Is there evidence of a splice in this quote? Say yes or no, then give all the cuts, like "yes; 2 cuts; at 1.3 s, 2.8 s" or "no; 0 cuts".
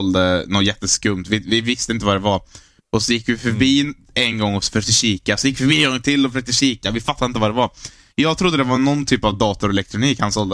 no; 0 cuts